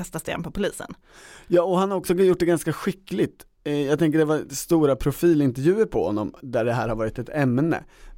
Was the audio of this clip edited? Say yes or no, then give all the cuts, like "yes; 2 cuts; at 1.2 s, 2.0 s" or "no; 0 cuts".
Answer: no; 0 cuts